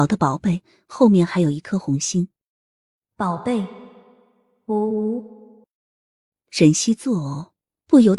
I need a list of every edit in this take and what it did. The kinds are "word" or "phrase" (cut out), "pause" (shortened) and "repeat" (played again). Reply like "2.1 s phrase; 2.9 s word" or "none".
none